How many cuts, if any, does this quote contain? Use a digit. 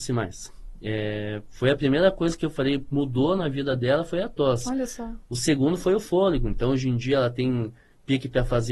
0